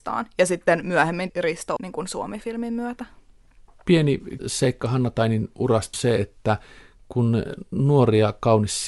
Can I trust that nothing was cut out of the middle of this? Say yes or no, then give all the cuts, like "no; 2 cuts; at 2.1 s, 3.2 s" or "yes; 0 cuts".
no; 4 cuts; at 1.3 s, 1.8 s, 4.4 s, 5.9 s